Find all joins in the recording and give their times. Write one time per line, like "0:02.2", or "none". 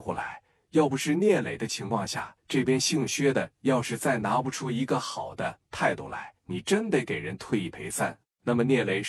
0:02.4
0:06.4

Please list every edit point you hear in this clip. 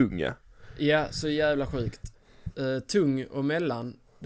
none

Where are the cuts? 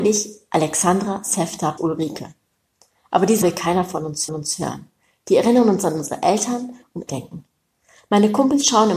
0:01.8
0:03.4
0:04.3
0:07.1

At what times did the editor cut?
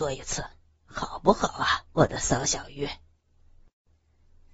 0:01.9

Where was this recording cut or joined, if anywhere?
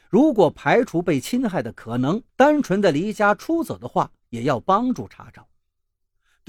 0:02.3

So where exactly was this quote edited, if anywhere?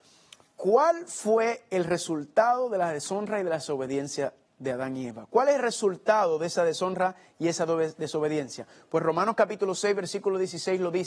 none

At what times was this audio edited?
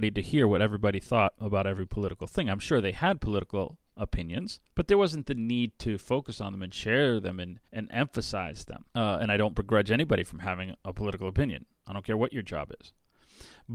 0:04.7
0:07.7
0:08.9

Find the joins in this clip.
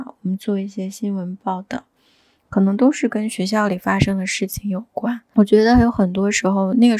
none

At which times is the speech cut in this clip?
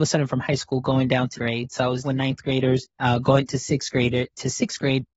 0:01.4
0:02.0
0:02.9

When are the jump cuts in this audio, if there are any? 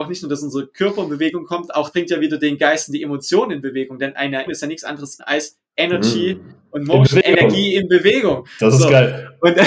0:01.9
0:04.5
0:05.2

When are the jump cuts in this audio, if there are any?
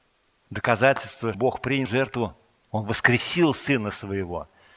0:01.3
0:01.9

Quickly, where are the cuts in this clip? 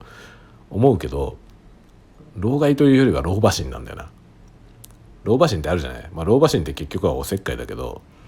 0:05.1

